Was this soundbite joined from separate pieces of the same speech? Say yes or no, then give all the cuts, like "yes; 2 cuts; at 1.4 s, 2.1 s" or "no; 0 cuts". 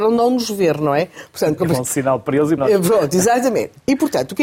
yes; 2 cuts; at 1.6 s, 2.6 s